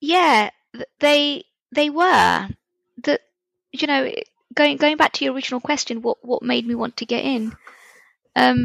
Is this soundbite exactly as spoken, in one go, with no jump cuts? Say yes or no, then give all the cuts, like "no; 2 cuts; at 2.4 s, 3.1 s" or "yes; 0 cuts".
yes; 0 cuts